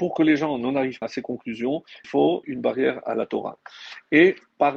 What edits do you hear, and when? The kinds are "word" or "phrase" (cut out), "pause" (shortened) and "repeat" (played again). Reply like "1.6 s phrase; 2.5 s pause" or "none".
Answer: 1.0 s word; 2.0 s word; 2.4 s word